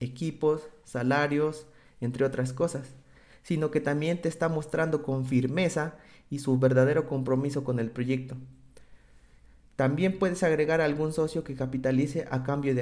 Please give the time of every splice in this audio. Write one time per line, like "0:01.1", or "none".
none